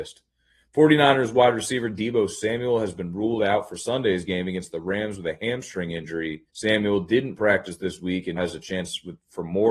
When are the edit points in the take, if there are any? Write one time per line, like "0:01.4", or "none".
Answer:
0:06.5
0:08.4